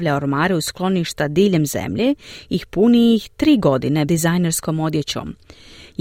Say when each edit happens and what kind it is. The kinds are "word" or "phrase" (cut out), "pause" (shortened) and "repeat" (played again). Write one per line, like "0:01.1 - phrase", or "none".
0:04.1 - word